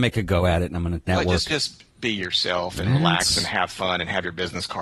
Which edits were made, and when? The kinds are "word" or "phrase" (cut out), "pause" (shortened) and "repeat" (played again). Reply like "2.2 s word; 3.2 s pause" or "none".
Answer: 1.1 s phrase; 1.5 s word; 1.9 s pause

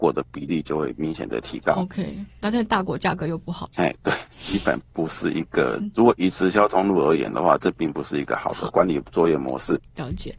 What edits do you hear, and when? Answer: none

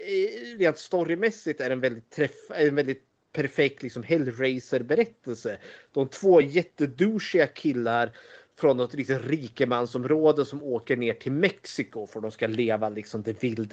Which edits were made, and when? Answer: none

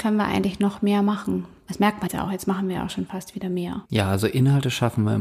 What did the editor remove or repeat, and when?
2.1 s word; 3.8 s pause

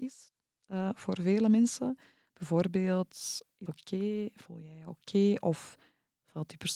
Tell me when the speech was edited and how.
3.7 s word

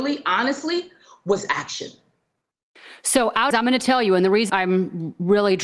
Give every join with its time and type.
3.5 s phrase; 4.5 s word

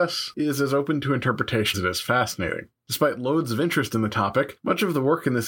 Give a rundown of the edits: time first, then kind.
1.7 s word

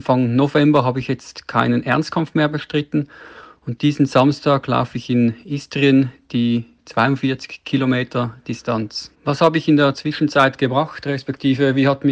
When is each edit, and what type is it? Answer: 9.1 s pause

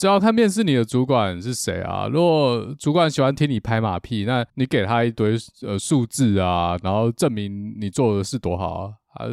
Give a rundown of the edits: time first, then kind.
4.5 s pause

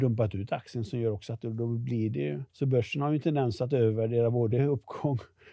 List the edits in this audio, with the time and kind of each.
2.5 s pause

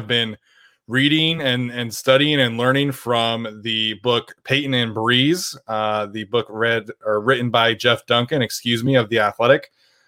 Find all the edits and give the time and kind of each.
none

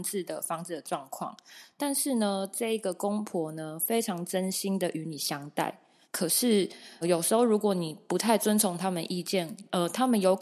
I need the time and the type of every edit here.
6.0 s pause; 7.0 s word

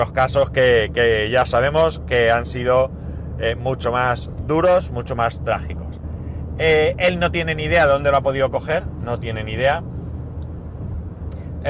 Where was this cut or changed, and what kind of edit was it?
none

